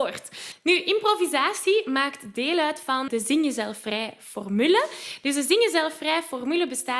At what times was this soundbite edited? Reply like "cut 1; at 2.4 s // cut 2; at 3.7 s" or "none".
cut 1; at 3.1 s